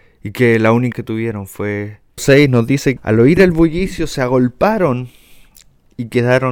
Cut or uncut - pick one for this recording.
cut